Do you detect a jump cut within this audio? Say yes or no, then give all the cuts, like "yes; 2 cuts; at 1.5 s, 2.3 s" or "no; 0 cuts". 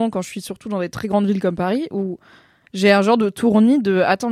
no; 0 cuts